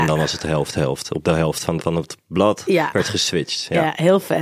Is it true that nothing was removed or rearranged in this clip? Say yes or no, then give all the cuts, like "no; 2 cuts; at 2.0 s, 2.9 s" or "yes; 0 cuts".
no; 1 cut; at 1.8 s